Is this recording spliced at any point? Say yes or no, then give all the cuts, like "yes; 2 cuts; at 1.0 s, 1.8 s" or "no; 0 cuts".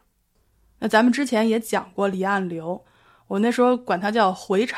no; 0 cuts